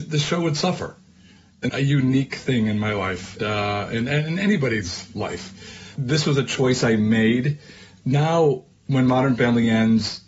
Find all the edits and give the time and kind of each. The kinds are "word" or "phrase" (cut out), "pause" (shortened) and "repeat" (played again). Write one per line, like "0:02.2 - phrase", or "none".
0:01.7 - phrase
0:03.4 - word
0:06.0 - word